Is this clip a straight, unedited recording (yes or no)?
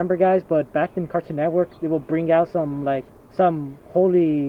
no